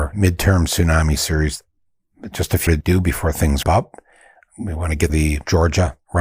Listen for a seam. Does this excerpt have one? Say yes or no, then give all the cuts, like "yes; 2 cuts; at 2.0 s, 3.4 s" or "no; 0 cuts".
yes; 3 cuts; at 2.7 s, 3.6 s, 5.1 s